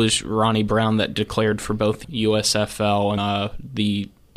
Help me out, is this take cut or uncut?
cut